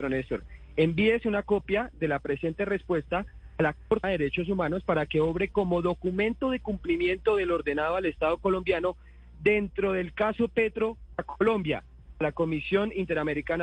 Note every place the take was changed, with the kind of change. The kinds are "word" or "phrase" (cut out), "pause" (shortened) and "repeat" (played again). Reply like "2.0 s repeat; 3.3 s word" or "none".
4.0 s word; 11.2 s word